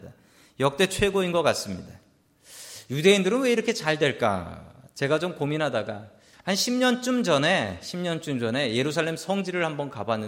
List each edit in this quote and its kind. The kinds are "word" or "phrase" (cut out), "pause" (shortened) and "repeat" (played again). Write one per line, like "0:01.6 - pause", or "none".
0:06.3 - pause

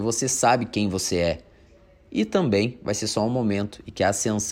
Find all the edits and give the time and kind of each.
none

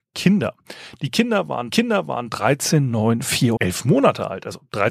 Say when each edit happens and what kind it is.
0:01.7 - repeat
0:03.6 - word

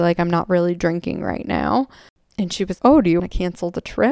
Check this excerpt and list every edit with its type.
0:02.8 - word
0:03.2 - word

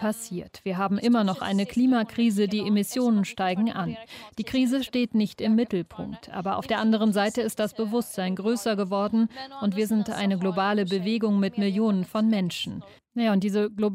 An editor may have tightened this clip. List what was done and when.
none

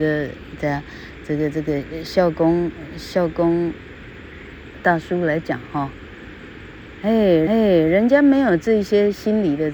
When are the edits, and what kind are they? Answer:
0:07.5 - repeat

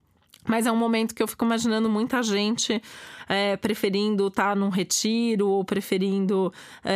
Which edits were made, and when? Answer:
none

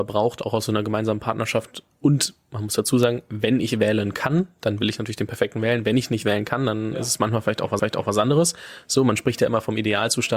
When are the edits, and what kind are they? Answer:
0:07.8 - repeat

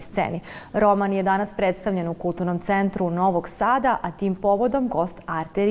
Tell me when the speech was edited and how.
none

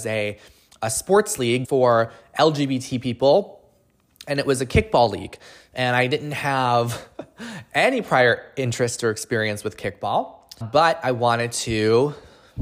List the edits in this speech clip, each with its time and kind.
0:01.6 - word
0:10.6 - word

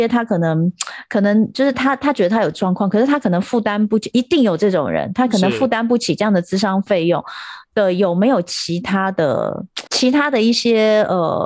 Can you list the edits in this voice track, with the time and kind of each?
0:09.9 - pause

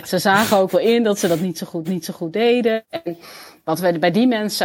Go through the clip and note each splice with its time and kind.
0:01.8 - repeat

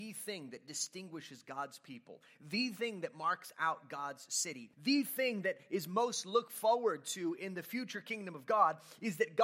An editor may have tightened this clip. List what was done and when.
0:04.7 - pause

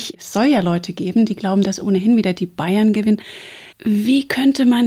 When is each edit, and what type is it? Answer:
0:03.7 - pause

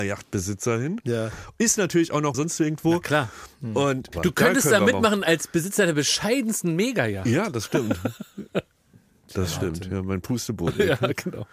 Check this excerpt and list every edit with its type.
0:02.3 - phrase
0:04.1 - phrase
0:08.5 - pause

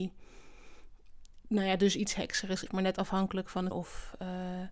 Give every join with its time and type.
0:02.7 - phrase
0:03.7 - word

